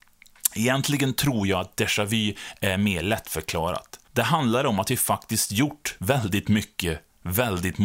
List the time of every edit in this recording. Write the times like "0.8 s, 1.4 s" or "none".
4.0 s